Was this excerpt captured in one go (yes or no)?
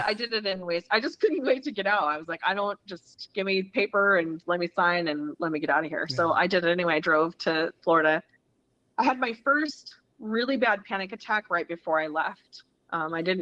yes